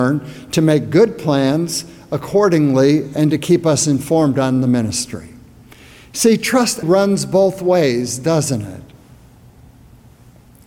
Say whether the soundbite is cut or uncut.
cut